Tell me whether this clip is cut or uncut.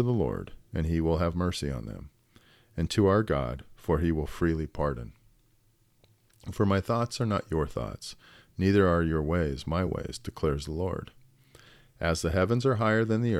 uncut